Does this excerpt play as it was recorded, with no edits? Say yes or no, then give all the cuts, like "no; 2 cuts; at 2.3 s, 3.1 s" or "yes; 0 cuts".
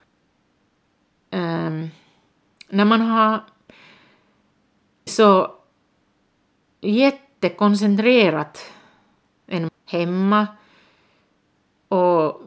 no; 2 cuts; at 5.1 s, 9.7 s